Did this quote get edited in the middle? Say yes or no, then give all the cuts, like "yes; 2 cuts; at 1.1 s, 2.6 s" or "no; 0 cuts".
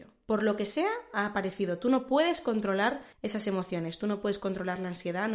yes; 1 cut; at 3.1 s